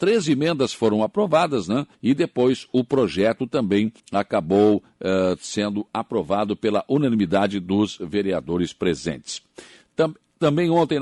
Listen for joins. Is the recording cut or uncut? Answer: cut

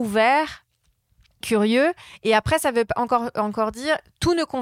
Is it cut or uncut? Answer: cut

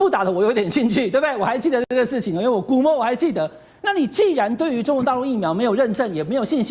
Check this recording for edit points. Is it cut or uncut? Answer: uncut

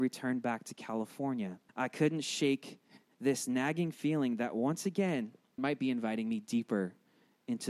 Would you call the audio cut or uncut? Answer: cut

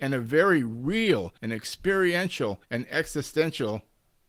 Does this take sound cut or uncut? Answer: cut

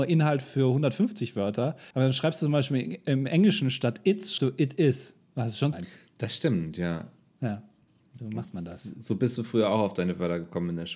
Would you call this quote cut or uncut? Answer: cut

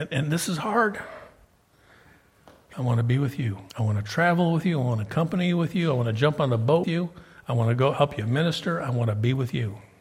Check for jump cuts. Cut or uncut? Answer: cut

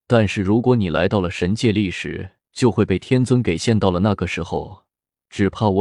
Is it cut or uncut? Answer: cut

